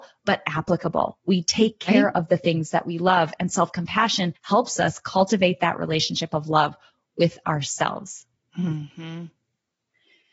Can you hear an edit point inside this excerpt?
yes; 2 cuts; at 4.4 s, 8.4 s

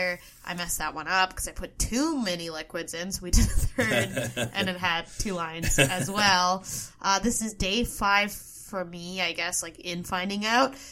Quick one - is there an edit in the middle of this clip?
no; 0 cuts

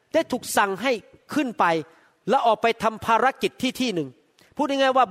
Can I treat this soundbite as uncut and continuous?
yes; 0 cuts

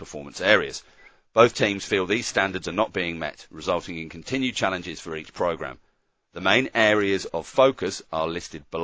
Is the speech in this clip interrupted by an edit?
no; 0 cuts

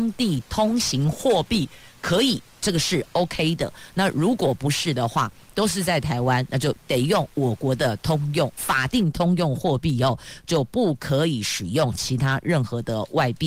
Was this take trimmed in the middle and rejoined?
no; 0 cuts

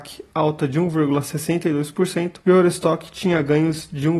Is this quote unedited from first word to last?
no; 1 cut; at 2.4 s

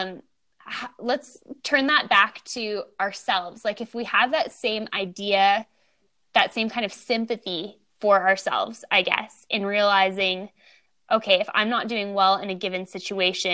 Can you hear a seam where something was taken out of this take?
no; 0 cuts

